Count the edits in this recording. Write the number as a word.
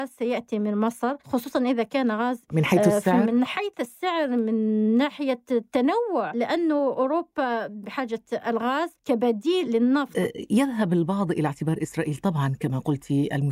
four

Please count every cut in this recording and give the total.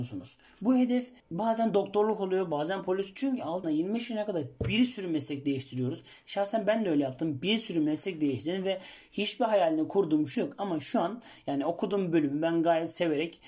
three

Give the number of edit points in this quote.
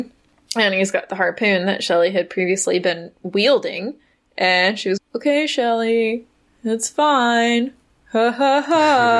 one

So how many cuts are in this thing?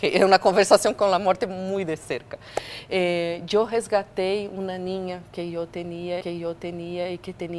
one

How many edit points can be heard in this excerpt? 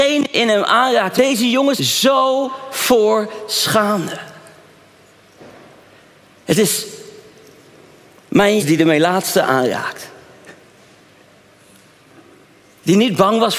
three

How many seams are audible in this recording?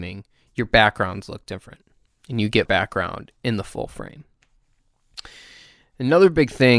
one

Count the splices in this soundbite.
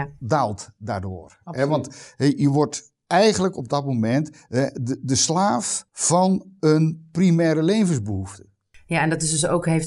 one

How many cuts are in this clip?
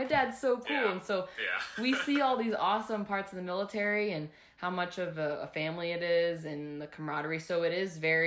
zero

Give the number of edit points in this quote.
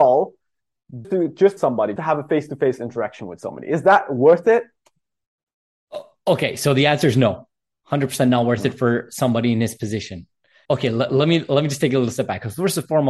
four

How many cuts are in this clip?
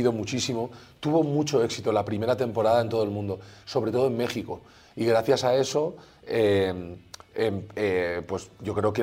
zero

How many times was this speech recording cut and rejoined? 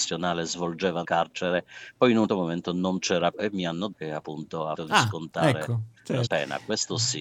six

